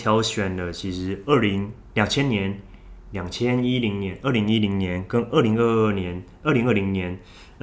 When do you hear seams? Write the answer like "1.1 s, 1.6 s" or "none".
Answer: none